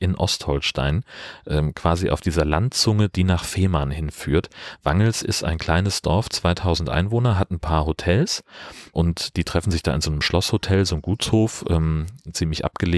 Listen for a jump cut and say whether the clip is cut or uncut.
uncut